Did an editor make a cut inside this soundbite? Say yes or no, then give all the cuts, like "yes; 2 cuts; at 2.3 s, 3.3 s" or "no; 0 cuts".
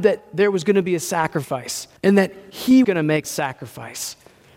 yes; 3 cuts; at 2.0 s, 2.8 s, 3.2 s